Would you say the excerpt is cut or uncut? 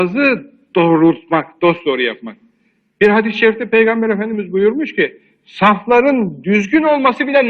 uncut